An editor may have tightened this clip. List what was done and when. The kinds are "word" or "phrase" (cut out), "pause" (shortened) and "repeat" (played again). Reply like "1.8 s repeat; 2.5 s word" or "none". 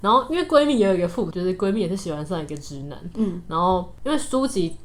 1.3 s word